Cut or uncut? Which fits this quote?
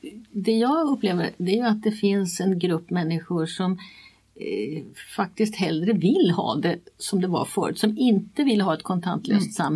uncut